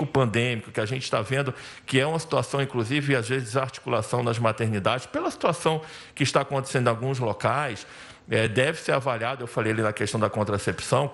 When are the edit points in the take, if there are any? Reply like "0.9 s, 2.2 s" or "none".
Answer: none